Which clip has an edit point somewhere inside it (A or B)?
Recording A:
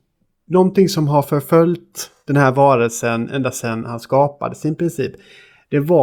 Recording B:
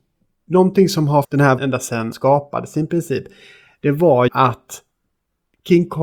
B